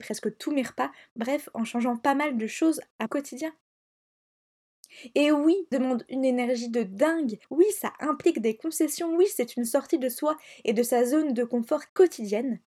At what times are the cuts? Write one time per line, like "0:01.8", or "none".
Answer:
0:03.1
0:05.7
0:07.4
0:11.9